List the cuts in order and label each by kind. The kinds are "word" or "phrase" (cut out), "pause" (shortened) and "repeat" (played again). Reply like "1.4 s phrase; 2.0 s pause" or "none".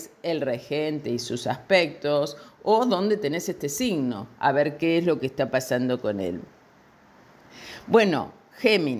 none